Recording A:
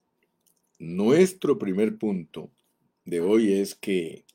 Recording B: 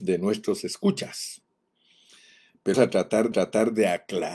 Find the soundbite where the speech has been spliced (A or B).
B